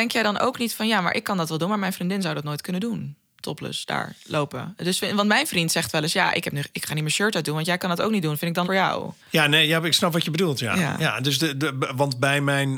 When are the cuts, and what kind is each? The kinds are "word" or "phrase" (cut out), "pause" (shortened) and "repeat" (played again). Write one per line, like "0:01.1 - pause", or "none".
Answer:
0:08.6 - word
0:09.2 - pause